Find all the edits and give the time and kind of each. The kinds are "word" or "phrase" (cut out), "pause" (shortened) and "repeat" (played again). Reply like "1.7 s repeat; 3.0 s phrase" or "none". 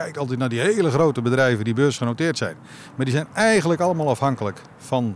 none